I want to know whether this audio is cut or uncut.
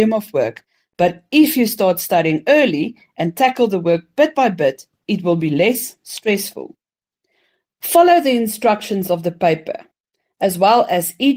uncut